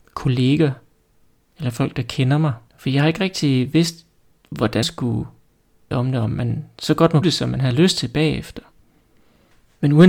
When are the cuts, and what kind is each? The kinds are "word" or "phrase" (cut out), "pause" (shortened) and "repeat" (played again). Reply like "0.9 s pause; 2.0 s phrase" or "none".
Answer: 2.7 s pause; 4.8 s word; 5.9 s word; 7.2 s word

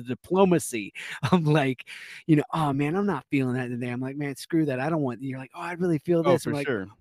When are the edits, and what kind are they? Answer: none

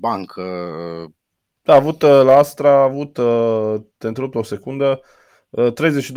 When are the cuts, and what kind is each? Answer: none

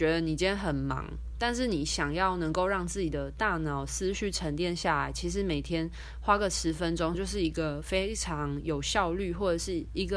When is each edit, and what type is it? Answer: 7.1 s phrase

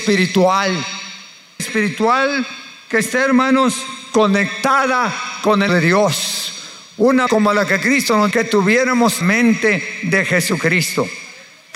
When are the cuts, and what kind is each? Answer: 1.6 s phrase; 5.7 s word; 7.3 s word; 8.3 s word; 9.2 s word

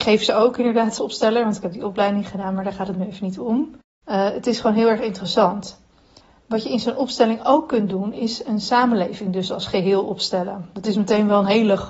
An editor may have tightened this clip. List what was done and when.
1.0 s word

